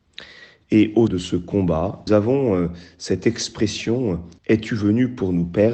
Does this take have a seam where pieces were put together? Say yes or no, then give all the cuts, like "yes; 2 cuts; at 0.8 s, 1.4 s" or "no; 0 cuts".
yes; 3 cuts; at 1.1 s, 2.1 s, 4.4 s